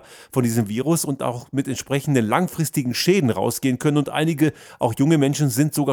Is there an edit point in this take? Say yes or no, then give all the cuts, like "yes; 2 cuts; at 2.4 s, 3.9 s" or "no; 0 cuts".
no; 0 cuts